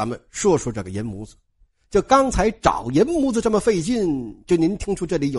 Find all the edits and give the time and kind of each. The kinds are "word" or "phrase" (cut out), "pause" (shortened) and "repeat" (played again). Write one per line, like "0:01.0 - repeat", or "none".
none